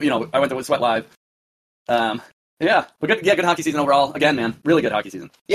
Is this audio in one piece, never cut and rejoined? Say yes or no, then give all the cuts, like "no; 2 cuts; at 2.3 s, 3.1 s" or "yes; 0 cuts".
yes; 0 cuts